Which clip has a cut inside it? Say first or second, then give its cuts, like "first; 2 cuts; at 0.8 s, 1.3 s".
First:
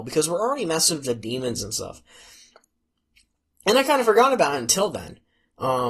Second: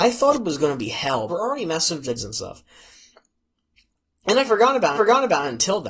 second; 4 cuts; at 1.3 s, 2.2 s, 4.5 s, 5.0 s